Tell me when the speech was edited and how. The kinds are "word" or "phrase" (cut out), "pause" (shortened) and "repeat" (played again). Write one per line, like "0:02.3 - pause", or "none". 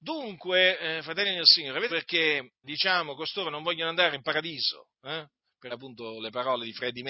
0:01.9 - word
0:02.6 - word
0:05.7 - word